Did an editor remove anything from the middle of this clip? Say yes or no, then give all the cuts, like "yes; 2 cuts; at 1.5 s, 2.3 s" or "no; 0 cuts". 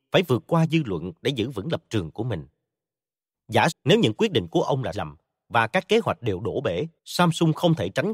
yes; 3 cuts; at 3.7 s, 4.9 s, 7.0 s